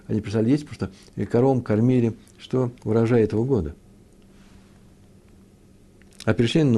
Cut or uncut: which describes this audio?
cut